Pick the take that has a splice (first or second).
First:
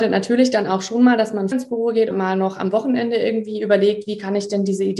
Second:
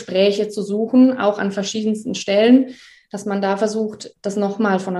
first